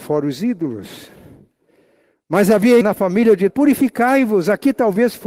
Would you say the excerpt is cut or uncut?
cut